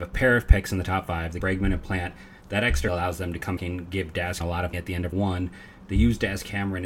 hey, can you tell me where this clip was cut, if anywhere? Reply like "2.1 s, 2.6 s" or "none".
1.4 s, 2.9 s, 3.6 s, 4.4 s, 4.7 s, 5.1 s

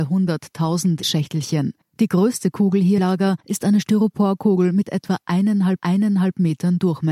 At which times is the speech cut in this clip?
1.0 s, 1.8 s, 3.0 s, 3.4 s, 5.8 s

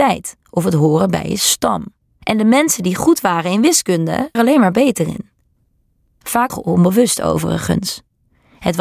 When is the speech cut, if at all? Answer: 2.0 s, 4.3 s, 6.5 s

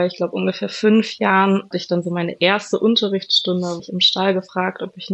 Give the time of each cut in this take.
1.7 s, 3.8 s

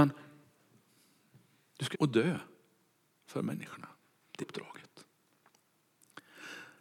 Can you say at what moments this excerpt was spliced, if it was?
1.9 s, 4.4 s

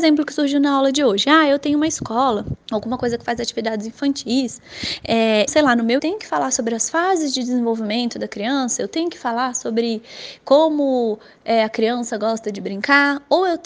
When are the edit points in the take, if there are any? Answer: 2.6 s, 5.5 s, 6.0 s

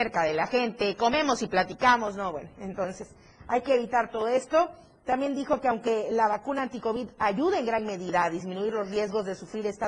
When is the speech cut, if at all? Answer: none

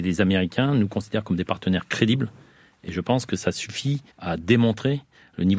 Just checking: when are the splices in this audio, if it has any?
4.1 s

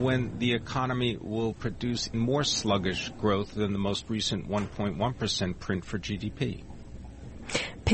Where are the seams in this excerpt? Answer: 2.1 s

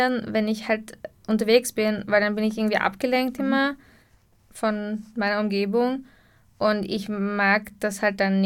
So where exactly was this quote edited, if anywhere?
none

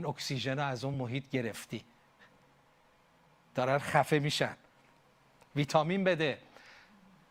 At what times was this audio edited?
none

